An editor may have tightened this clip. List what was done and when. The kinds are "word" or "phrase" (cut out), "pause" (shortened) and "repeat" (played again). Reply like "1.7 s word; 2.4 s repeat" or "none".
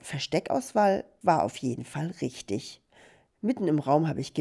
none